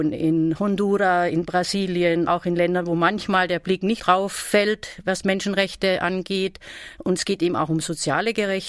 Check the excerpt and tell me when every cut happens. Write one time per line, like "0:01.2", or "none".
0:02.3
0:04.0